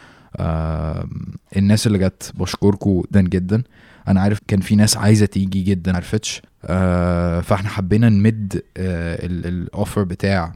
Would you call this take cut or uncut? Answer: cut